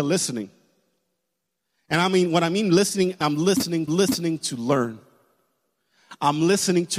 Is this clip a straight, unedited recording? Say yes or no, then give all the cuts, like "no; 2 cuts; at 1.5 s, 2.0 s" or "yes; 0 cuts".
no; 2 cuts; at 3.2 s, 3.9 s